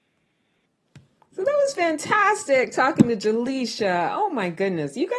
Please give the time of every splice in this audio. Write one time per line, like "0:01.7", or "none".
none